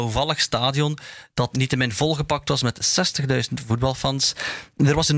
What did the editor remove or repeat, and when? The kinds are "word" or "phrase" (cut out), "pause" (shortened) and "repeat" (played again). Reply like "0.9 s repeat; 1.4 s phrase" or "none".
1.5 s word